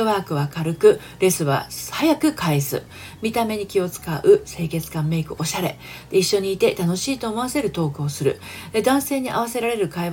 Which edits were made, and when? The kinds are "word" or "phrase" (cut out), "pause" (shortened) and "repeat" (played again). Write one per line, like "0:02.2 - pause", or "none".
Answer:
none